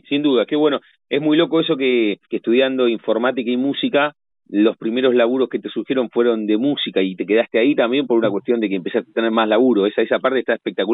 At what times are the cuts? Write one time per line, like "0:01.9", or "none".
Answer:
0:02.2
0:04.3